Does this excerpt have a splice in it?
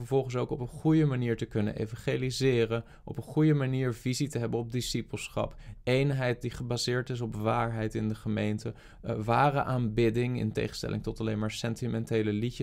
no; 0 cuts

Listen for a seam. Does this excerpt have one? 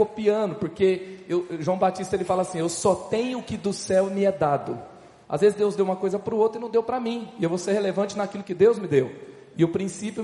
no; 0 cuts

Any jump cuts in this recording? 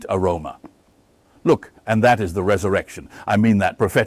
yes; 1 cut; at 1.8 s

